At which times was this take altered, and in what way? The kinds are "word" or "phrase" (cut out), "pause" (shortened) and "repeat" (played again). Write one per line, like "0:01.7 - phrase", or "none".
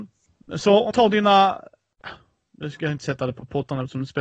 0:00.9 - word